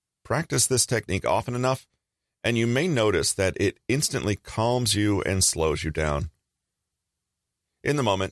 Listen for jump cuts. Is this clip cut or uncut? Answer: uncut